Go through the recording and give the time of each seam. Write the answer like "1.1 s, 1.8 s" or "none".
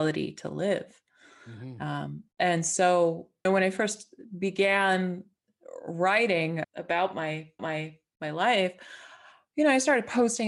2.3 s, 3.4 s, 6.6 s, 7.6 s